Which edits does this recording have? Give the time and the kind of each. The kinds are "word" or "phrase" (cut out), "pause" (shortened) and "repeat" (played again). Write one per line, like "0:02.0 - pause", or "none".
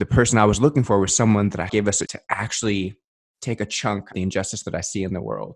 0:01.7 - word
0:02.1 - word
0:04.1 - phrase